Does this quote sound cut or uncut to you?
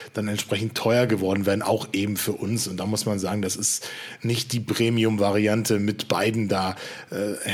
uncut